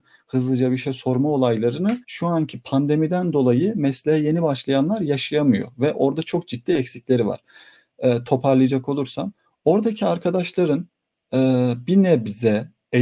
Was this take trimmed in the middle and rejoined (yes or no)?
yes